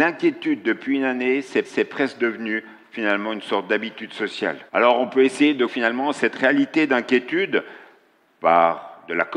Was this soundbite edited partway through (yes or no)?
yes